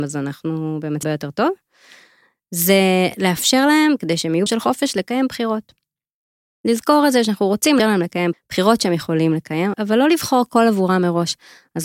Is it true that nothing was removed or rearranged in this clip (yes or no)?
no